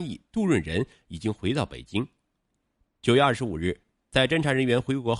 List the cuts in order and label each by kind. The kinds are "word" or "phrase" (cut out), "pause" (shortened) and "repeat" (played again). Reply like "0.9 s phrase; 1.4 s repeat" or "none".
none

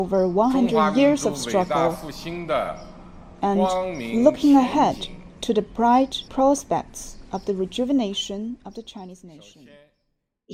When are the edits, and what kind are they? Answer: 6.3 s pause

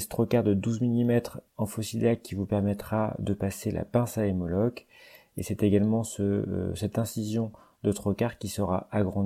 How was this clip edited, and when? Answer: none

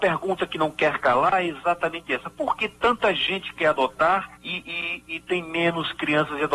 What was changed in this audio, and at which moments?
4.4 s pause

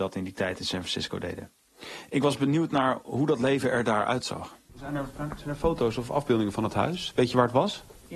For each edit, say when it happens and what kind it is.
4.7 s pause

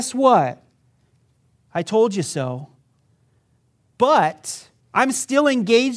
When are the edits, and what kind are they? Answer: 4.8 s pause

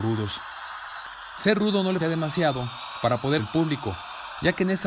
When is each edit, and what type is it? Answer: 2.0 s word; 3.4 s phrase

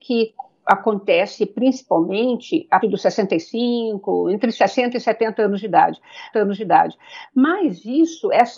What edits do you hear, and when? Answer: 2.8 s word; 6.3 s repeat

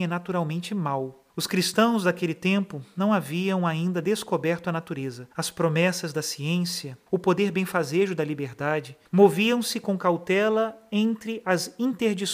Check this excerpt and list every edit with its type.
1.3 s pause; 5.3 s pause; 7.1 s pause; 9.1 s pause

